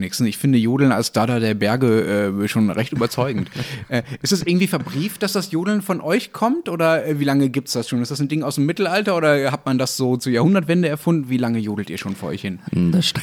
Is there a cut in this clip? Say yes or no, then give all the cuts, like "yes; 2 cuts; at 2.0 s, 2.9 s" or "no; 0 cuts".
no; 0 cuts